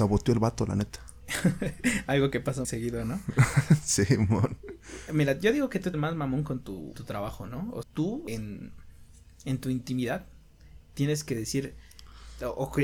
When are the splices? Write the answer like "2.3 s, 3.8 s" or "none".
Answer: 2.6 s, 5.9 s, 6.9 s, 7.8 s, 8.3 s